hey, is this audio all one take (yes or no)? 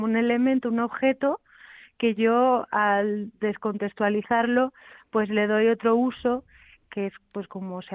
yes